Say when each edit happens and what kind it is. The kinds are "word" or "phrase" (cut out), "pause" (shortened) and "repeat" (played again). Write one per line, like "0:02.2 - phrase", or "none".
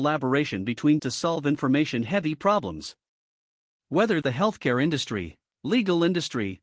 0:01.0 - word
0:04.2 - word